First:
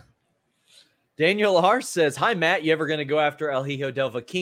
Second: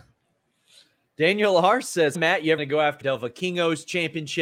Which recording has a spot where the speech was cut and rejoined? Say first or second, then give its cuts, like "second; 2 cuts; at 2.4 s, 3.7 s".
second; 3 cuts; at 2.1 s, 2.6 s, 3.0 s